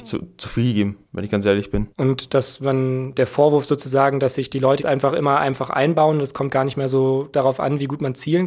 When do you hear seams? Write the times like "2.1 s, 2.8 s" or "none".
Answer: 1.0 s, 1.9 s, 4.8 s